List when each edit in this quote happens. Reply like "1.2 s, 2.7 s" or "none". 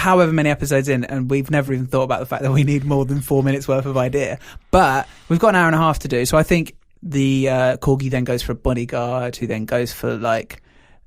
none

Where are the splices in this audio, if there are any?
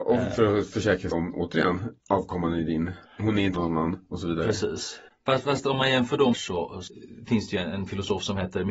1.1 s, 2.0 s, 3.1 s, 3.5 s, 6.3 s

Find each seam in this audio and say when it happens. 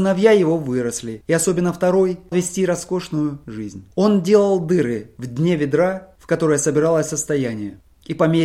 2.3 s, 3.9 s

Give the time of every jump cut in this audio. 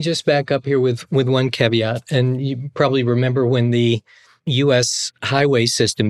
none

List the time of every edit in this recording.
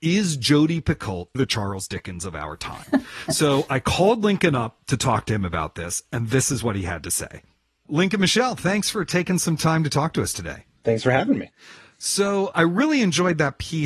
1.3 s

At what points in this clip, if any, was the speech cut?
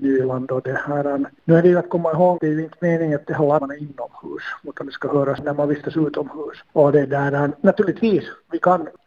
2.4 s, 3.6 s

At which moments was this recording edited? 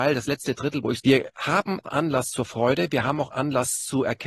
1.0 s, 1.8 s

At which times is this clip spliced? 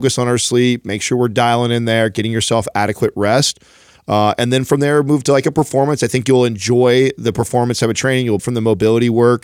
8.4 s

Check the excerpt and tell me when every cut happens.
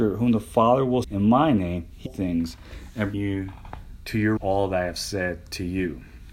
1.0 s, 2.1 s, 3.1 s, 4.4 s

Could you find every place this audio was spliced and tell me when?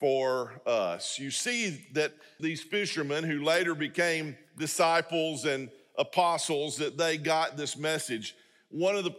2.4 s

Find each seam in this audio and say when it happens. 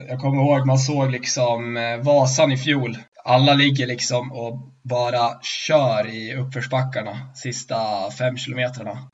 none

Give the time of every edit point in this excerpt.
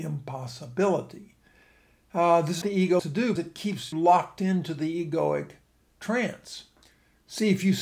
2.6 s, 3.0 s, 3.4 s, 3.9 s

